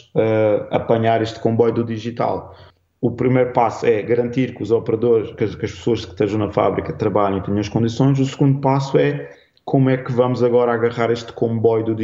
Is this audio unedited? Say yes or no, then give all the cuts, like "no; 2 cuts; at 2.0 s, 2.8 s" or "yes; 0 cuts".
yes; 0 cuts